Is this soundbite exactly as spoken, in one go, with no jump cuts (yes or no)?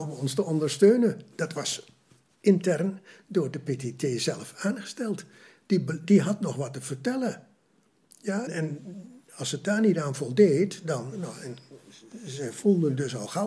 no